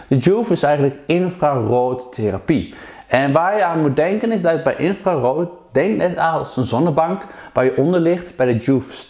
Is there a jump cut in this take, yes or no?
no